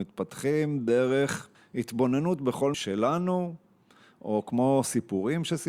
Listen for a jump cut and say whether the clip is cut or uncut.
cut